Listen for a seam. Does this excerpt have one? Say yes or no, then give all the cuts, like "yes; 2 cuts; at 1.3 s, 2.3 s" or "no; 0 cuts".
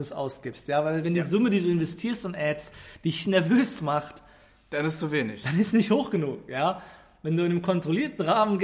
yes; 2 cuts; at 1.0 s, 3.2 s